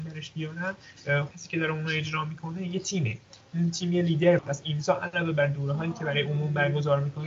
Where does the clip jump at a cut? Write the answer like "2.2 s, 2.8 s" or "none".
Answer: 1.3 s, 4.4 s